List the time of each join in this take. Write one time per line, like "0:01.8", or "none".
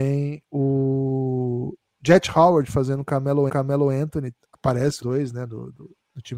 0:03.5
0:05.0

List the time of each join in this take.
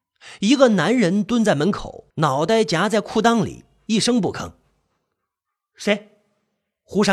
0:02.1

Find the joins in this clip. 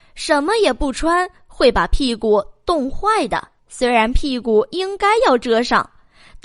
0:03.6

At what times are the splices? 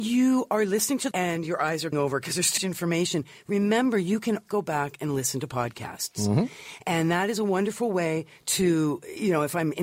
0:01.1
0:01.9
0:02.6
0:04.5

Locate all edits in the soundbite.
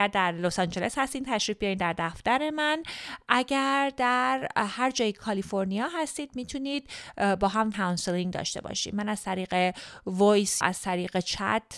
0:07.7
0:10.6

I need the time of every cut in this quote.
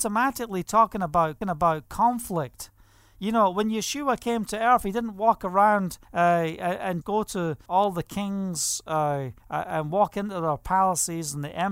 0:01.4
0:06.0
0:07.0
0:07.7
0:09.4

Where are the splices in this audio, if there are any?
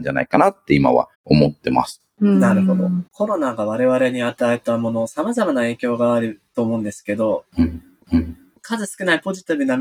0:01.1
0:03.1
0:08.0

